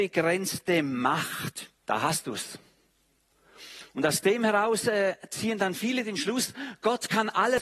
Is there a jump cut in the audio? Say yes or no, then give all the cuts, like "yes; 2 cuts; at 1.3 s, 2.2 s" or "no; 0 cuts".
yes; 1 cut; at 1.8 s